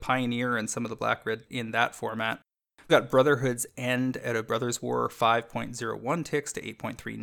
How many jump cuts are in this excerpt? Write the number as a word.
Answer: two